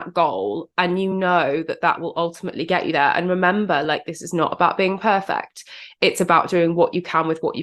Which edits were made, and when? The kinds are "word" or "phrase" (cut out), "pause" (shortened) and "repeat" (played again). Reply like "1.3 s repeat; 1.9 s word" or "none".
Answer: none